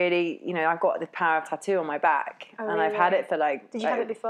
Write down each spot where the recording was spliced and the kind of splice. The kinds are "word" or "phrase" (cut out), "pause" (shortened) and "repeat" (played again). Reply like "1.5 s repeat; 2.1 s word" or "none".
1.4 s word